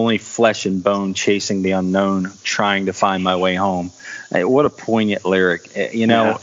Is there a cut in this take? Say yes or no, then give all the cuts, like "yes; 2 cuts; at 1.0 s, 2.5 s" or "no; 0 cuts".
no; 0 cuts